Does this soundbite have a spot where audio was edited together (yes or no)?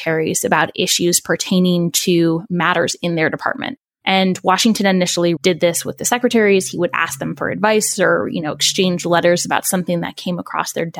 yes